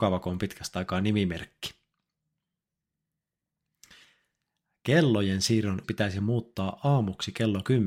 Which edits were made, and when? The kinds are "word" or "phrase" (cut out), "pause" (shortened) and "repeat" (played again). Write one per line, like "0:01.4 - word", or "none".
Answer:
0:05.8 - word